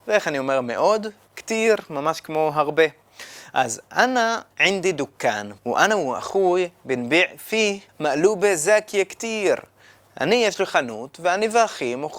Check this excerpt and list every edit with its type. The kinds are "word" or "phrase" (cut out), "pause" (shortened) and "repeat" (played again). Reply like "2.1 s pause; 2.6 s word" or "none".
4.5 s pause; 5.6 s pause; 7.9 s pause

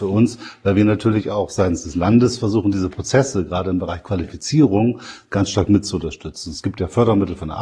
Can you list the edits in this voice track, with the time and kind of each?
none

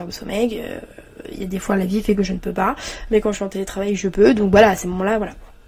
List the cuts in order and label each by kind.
none

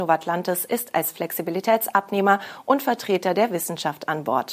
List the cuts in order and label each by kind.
none

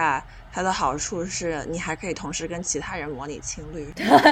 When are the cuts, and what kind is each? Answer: none

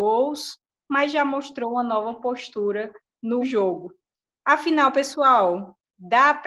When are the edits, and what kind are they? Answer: 3.4 s word

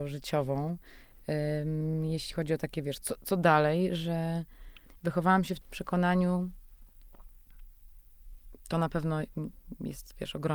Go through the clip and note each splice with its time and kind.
3.0 s word; 4.9 s word; 5.6 s word

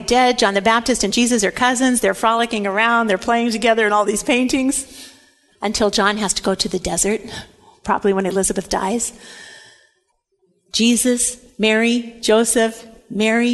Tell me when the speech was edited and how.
none

